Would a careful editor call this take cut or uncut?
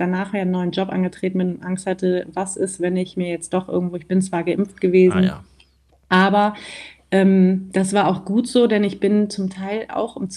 uncut